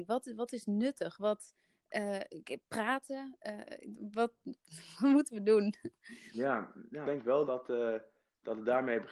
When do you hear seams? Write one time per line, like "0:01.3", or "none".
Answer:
0:04.6
0:07.0
0:07.5